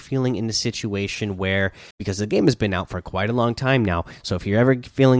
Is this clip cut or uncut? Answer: cut